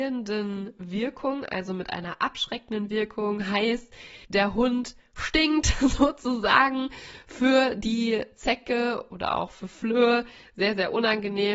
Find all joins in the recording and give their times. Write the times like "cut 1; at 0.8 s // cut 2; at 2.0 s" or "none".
cut 1; at 4.2 s

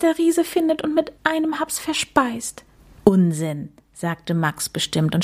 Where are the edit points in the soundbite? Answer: cut 1; at 1.2 s // cut 2; at 2.8 s

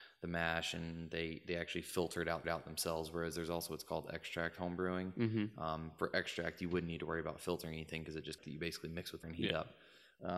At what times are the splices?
cut 1; at 2.4 s // cut 2; at 8.4 s // cut 3; at 9.2 s

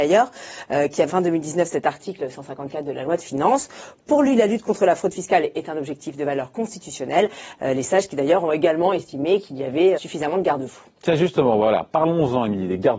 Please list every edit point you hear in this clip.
cut 1; at 1.1 s // cut 2; at 9.9 s

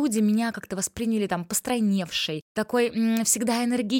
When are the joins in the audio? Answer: none

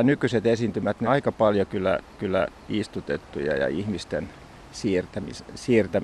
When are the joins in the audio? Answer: cut 1; at 1.0 s // cut 2; at 2.2 s

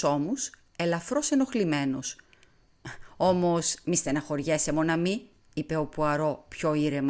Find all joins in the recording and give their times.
none

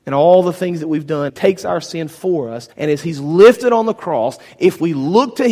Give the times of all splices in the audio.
cut 1; at 1.3 s // cut 2; at 2.7 s

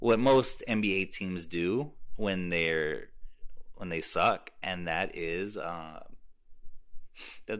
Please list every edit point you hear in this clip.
none

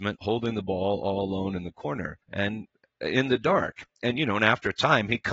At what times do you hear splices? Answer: cut 1; at 2.2 s

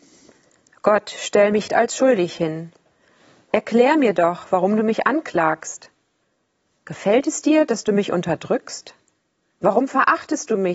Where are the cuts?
cut 1; at 1.7 s

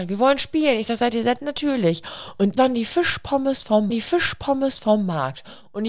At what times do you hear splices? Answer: cut 1; at 2.6 s // cut 2; at 3.9 s

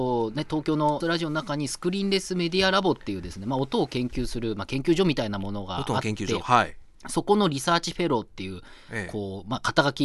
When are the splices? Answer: cut 1; at 1.0 s

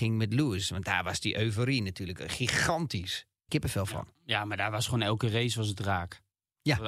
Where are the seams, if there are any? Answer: cut 1; at 3.5 s

